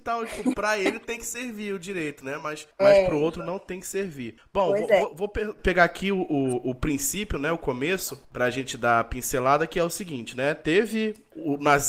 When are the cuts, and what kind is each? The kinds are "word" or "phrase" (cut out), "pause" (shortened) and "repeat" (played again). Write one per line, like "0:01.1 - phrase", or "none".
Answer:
none